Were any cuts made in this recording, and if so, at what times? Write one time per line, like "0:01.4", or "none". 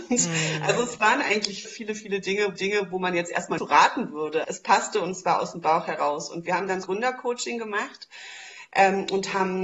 0:01.6
0:02.5
0:03.6
0:04.4
0:06.8

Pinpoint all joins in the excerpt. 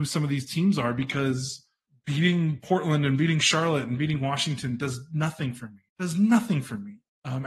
0:01.9
0:05.9

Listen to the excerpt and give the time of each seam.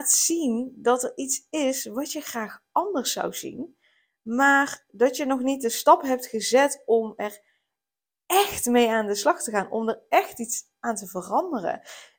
none

